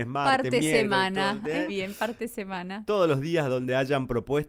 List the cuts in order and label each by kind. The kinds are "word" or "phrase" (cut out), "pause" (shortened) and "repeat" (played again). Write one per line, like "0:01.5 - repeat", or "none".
0:01.7 - word